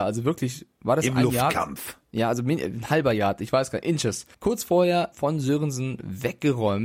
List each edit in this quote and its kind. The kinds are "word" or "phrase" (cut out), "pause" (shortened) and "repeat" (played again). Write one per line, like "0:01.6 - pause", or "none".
0:04.3 - pause
0:05.1 - word